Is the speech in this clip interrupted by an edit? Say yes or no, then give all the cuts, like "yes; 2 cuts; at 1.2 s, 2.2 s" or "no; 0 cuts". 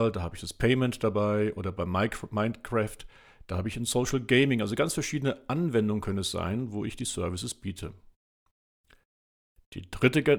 no; 0 cuts